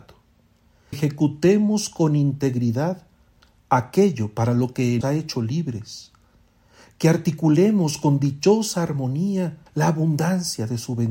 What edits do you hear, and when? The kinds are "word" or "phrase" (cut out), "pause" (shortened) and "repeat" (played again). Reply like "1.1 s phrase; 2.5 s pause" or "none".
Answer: 0.9 s word; 5.0 s word; 9.7 s pause